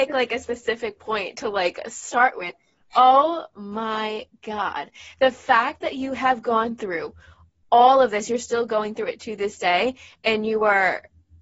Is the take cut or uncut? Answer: uncut